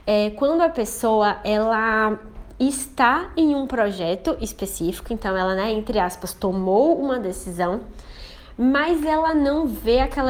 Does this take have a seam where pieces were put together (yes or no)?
no